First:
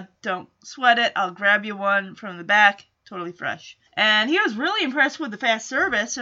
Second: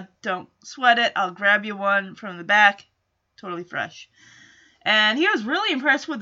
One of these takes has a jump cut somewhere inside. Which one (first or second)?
first